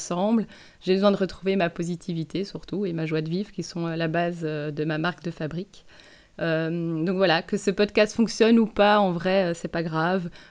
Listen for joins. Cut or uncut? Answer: uncut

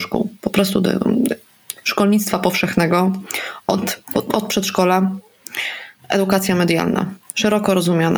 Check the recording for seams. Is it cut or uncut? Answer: uncut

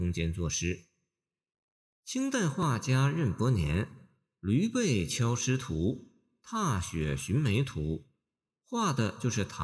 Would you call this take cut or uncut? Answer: uncut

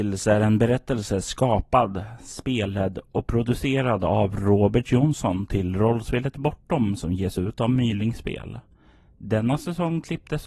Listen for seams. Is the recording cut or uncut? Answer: uncut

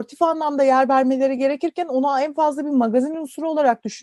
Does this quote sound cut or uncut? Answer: uncut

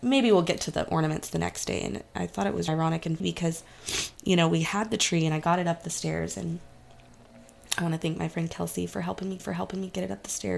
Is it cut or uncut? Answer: cut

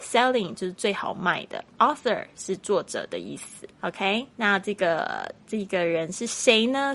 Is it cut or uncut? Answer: cut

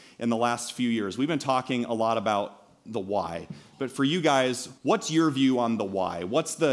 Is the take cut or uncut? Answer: cut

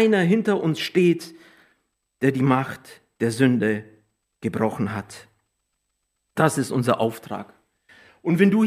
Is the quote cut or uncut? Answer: uncut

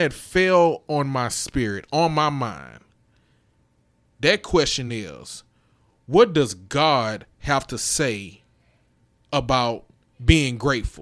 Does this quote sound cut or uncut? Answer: uncut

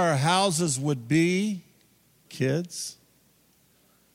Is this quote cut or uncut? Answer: cut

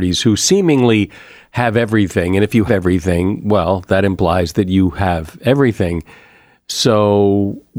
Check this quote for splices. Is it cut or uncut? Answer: cut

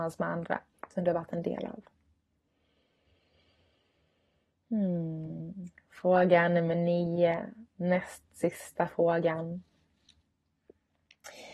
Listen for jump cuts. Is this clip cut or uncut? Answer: uncut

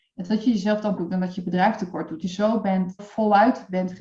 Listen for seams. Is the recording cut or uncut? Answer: cut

